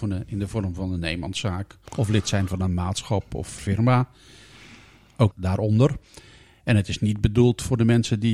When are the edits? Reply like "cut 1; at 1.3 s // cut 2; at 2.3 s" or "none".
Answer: cut 1; at 1.9 s // cut 2; at 3.6 s // cut 3; at 5.3 s